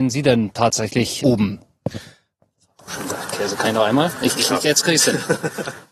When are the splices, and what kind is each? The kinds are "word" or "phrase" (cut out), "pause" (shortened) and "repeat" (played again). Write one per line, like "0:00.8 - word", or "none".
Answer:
0:01.2 - word